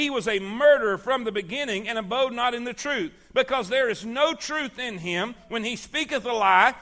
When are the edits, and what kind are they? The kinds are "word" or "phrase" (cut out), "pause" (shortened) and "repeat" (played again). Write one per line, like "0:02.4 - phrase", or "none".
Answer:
none